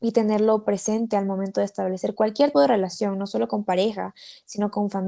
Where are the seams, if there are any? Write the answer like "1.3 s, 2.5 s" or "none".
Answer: 2.5 s

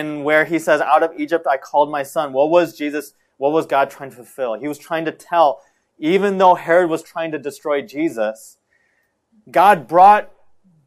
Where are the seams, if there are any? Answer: none

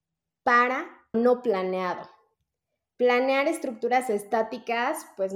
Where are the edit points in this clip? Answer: 1.1 s

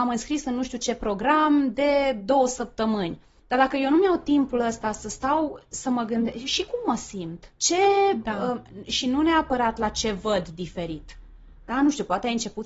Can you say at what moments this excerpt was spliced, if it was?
7.5 s

